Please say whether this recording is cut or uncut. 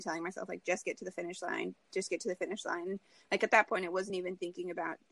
uncut